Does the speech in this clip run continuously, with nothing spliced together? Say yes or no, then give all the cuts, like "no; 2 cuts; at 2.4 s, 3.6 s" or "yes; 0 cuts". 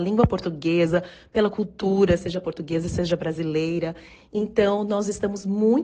yes; 0 cuts